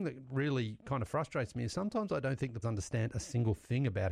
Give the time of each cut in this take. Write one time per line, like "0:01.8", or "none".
0:02.6